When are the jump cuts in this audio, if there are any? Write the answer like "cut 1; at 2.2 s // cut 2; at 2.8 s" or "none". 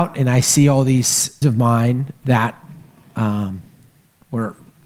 cut 1; at 1.4 s // cut 2; at 2.2 s